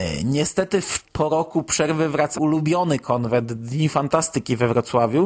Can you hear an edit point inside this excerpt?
yes; 2 cuts; at 1.0 s, 2.3 s

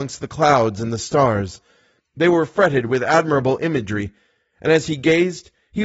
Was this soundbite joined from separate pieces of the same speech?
no; 0 cuts

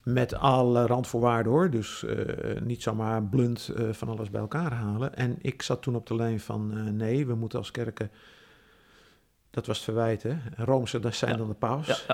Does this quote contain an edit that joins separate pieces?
no; 0 cuts

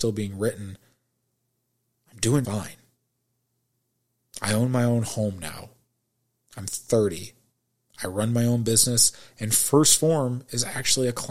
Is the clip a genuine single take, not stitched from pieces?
no; 1 cut; at 2.4 s

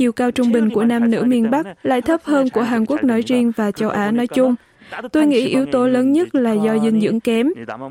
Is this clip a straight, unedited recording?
yes; 0 cuts

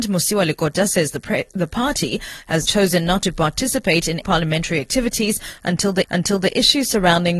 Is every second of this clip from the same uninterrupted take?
no; 3 cuts; at 2.7 s, 4.2 s, 6.0 s

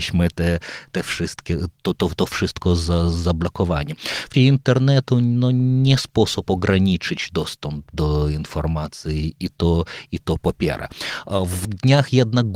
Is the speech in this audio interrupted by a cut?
yes; 2 cuts; at 4.3 s, 11.6 s

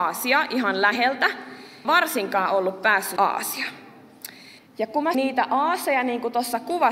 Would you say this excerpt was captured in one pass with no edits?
no; 4 cuts; at 1.8 s, 3.2 s, 4.6 s, 5.1 s

